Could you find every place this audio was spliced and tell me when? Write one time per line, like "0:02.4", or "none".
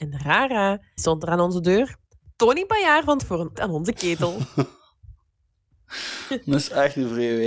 0:01.0
0:03.2
0:03.6